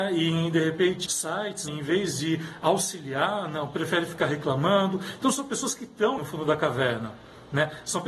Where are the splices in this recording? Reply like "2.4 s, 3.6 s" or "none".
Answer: 1.1 s, 1.7 s, 6.2 s